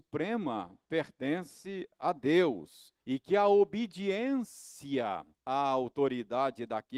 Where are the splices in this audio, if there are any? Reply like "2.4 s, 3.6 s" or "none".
3.0 s, 5.3 s